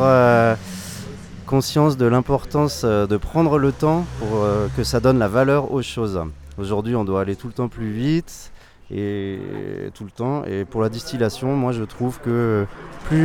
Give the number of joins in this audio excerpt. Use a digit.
0